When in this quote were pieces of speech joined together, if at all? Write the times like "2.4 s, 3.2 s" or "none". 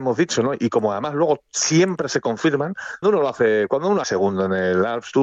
3.0 s, 4.0 s